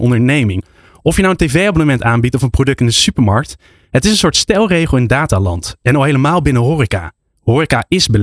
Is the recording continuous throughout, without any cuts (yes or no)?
yes